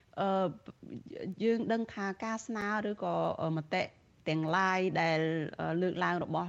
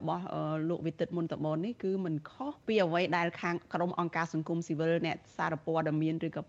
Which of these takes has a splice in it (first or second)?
second